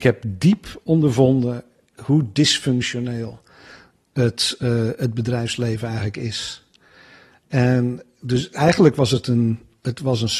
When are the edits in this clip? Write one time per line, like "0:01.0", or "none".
none